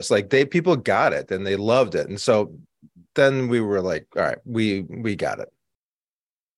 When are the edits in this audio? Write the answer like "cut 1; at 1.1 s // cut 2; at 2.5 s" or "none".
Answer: none